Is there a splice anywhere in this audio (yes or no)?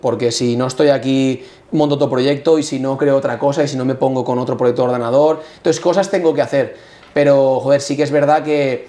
no